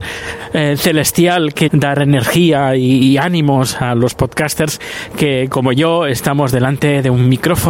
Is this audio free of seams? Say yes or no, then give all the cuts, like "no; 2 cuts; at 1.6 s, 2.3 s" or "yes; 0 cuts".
no; 1 cut; at 1.7 s